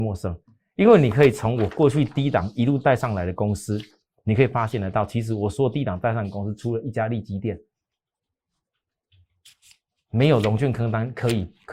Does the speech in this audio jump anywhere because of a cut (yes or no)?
no